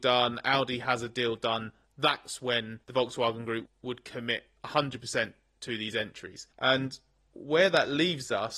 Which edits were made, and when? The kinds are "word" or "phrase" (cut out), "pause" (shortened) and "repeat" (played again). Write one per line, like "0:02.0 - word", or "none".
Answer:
0:02.8 - pause
0:03.7 - word
0:04.6 - pause
0:06.5 - pause